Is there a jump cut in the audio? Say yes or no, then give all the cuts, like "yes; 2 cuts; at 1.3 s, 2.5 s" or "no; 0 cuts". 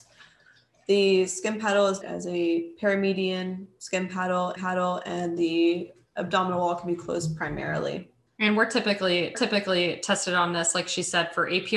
yes; 4 cuts; at 2.0 s, 4.6 s, 8.3 s, 9.3 s